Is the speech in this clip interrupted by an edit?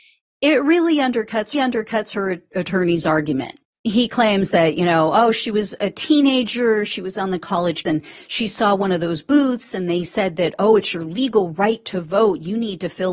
yes; 2 cuts; at 1.5 s, 7.8 s

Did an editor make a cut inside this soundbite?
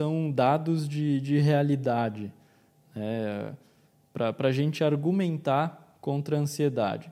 no; 0 cuts

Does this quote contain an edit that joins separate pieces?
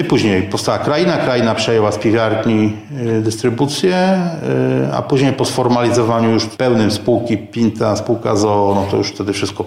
no; 0 cuts

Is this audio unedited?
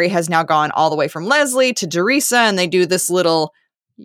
yes; 0 cuts

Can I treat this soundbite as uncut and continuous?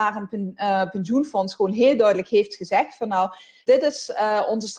no; 1 cut; at 3.7 s

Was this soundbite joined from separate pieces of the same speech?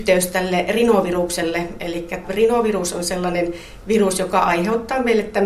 yes; 1 cut; at 2.2 s

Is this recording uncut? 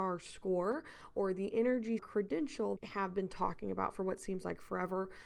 no; 2 cuts; at 2.0 s, 2.8 s

